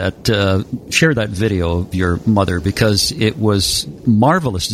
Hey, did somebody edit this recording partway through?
yes; 1 cut; at 1.9 s

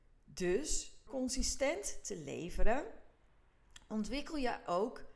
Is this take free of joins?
no; 1 cut; at 1.1 s

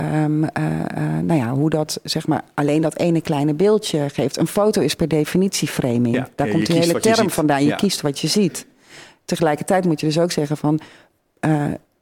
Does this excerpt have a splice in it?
no; 0 cuts

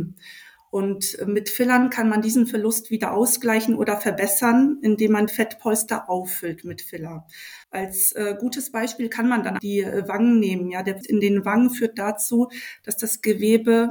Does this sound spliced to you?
yes; 4 cuts; at 5.3 s, 7.6 s, 9.6 s, 11.0 s

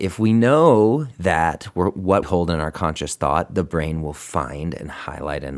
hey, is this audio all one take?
no; 1 cut; at 2.2 s

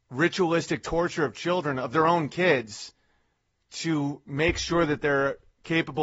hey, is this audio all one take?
yes; 0 cuts

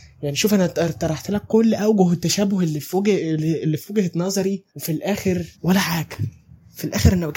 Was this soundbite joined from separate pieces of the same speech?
yes; 2 cuts; at 4.7 s, 5.5 s

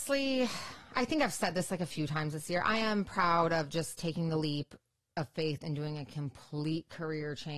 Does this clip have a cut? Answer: no; 0 cuts

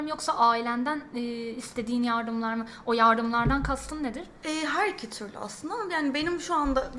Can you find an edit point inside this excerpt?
no; 0 cuts

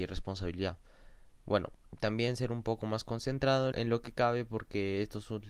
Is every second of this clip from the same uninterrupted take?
no; 1 cut; at 3.7 s

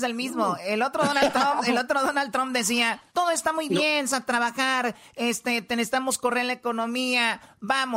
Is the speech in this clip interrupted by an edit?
yes; 2 cuts; at 3.1 s, 4.1 s

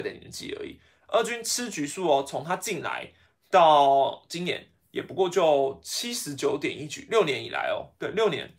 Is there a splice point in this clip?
no; 0 cuts

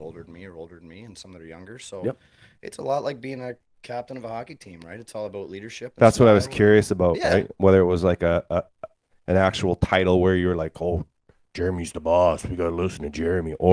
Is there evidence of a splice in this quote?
no; 0 cuts

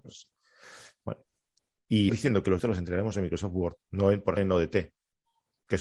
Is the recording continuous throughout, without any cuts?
no; 4 cuts; at 2.1 s, 2.6 s, 3.8 s, 4.4 s

